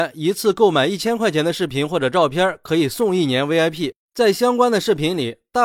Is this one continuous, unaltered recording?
yes; 0 cuts

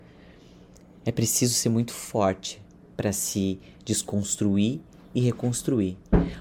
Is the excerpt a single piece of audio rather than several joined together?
yes; 0 cuts

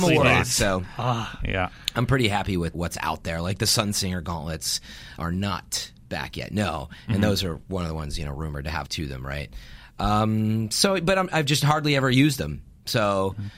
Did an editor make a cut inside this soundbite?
yes; 3 cuts; at 2.7 s, 5.2 s, 8.9 s

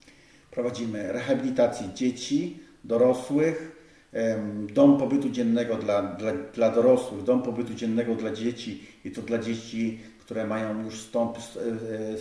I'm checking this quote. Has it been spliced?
no; 0 cuts

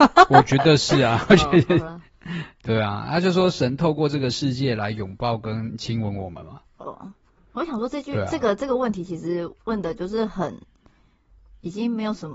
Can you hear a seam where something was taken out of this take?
no; 0 cuts

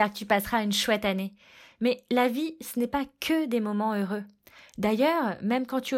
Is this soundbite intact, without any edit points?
yes; 0 cuts

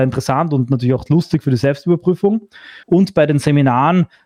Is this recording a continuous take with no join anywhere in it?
no; 1 cut; at 2.8 s

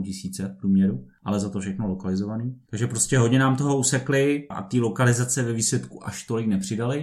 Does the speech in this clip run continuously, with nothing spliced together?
no; 1 cut; at 4.5 s

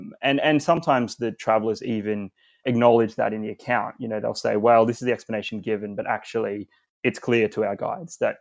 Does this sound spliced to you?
no; 0 cuts

